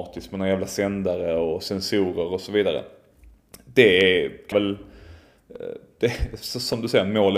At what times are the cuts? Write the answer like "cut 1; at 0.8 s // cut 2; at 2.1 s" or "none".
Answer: cut 1; at 4.5 s